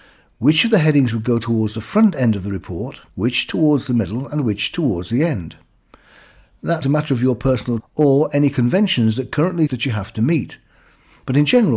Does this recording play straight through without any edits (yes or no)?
no